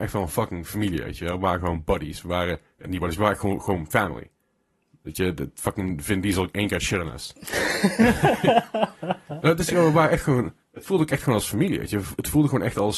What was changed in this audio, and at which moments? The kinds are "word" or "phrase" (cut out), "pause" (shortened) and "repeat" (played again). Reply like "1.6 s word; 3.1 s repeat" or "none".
10.6 s pause